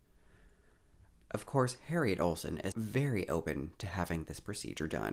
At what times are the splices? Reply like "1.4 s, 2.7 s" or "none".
2.7 s